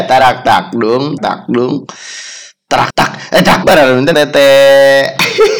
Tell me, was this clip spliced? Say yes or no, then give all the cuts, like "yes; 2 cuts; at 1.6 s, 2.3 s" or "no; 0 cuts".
yes; 4 cuts; at 1.2 s, 2.9 s, 3.6 s, 4.1 s